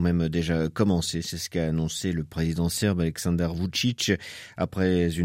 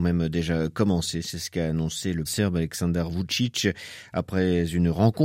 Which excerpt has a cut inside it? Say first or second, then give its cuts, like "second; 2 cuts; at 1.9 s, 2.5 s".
second; 1 cut; at 2.2 s